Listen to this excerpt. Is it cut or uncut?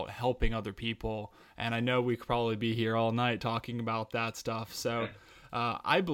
uncut